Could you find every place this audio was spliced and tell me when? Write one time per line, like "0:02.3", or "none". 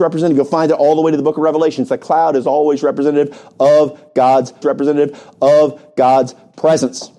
0:04.6